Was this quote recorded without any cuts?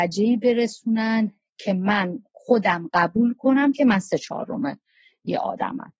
yes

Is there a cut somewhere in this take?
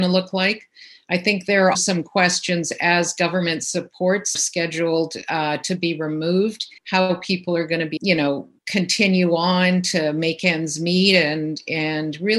yes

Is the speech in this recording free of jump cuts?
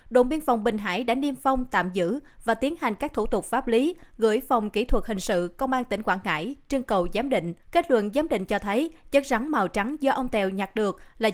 no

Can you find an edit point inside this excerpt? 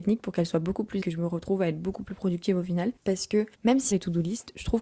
yes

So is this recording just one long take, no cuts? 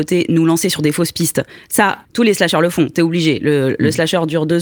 no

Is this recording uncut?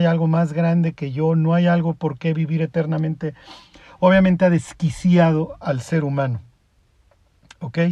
yes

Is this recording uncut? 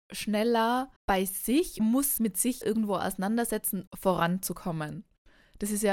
no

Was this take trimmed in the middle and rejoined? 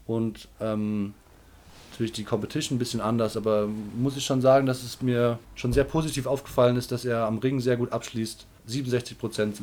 yes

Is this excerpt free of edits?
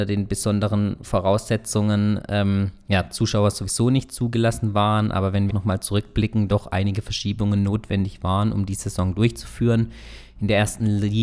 no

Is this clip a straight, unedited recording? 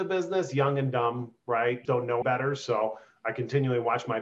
no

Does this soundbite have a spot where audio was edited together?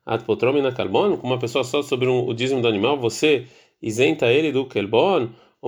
no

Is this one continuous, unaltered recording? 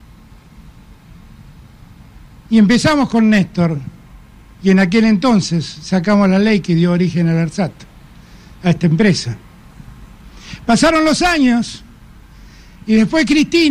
yes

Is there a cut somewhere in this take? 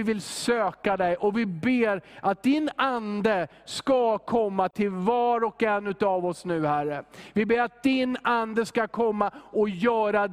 no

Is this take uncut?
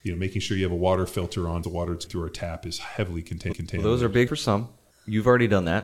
no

